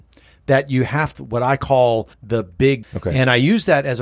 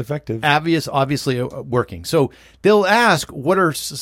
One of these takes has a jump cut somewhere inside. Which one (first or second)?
first